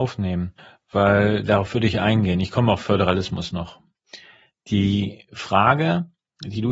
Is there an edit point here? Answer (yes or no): no